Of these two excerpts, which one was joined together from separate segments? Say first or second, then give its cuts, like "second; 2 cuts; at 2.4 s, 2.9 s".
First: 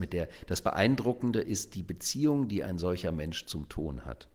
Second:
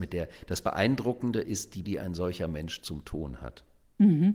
second; 1 cut; at 1.8 s